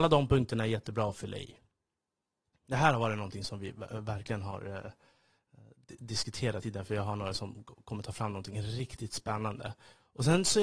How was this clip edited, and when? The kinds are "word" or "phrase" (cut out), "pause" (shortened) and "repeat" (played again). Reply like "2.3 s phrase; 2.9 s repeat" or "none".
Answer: 6.6 s word